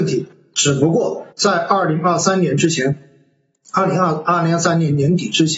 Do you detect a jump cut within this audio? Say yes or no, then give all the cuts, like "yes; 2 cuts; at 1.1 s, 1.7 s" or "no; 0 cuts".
yes; 1 cut; at 1.3 s